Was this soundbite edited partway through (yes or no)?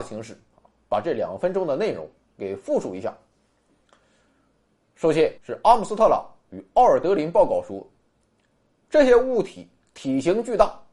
yes